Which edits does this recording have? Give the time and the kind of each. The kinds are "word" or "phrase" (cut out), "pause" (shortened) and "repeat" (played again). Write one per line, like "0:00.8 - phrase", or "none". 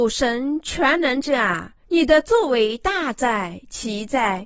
0:01.8 - pause

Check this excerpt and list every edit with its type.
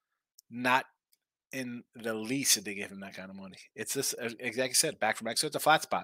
none

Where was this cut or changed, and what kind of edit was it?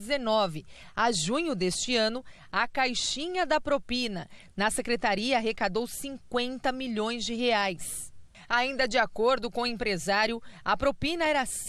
none

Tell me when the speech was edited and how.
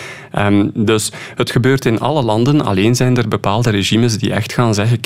none

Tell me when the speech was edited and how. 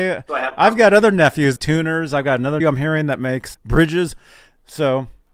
0:01.6 - phrase
0:02.6 - word
0:03.5 - word

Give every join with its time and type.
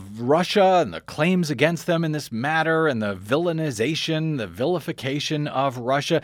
none

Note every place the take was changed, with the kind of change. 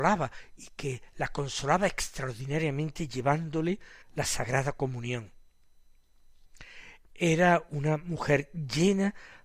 0:04.0 - pause

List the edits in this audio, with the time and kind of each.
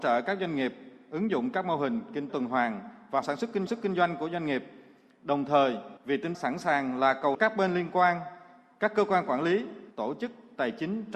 0:02.3 - word
0:03.2 - phrase
0:03.7 - repeat
0:06.0 - pause
0:06.3 - word
0:07.3 - phrase
0:09.9 - pause

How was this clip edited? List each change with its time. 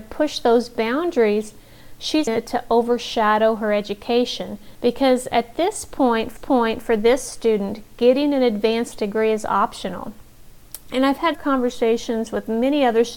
0:02.3 - word
0:04.7 - pause
0:06.4 - repeat
0:11.3 - word

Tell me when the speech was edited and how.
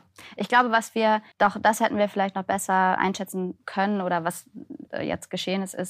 0:01.3 - pause
0:03.0 - word
0:04.9 - word

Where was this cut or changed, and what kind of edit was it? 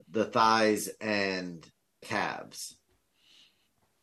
0:02.0 - word

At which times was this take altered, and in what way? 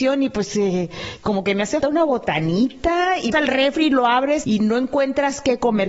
0:01.8 - word
0:03.3 - word
0:04.4 - word

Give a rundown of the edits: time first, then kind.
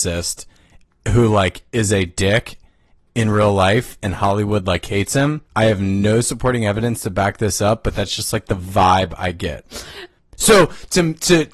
0:05.5 - pause

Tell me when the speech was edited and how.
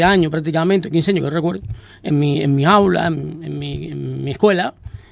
none

